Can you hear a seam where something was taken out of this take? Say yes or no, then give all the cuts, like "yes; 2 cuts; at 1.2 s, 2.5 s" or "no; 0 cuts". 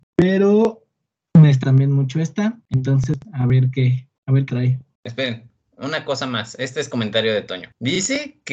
yes; 3 cuts; at 1.6 s, 3.2 s, 4.5 s